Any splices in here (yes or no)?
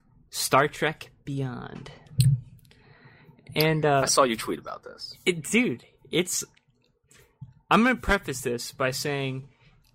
no